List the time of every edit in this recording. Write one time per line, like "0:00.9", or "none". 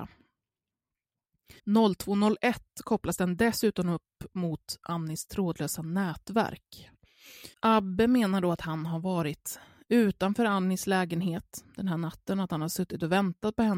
0:01.6
0:07.5